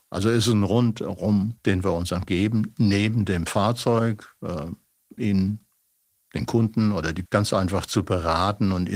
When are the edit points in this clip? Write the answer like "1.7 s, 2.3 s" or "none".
1.6 s, 2.3 s, 5.2 s, 7.3 s